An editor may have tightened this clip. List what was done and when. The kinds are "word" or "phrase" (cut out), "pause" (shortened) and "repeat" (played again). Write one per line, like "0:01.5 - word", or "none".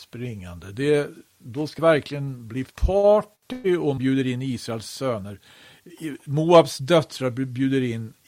0:01.8 - word
0:02.7 - word
0:04.0 - word